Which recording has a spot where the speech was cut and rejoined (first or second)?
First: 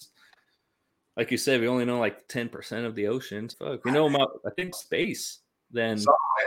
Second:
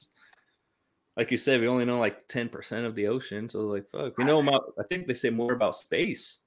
first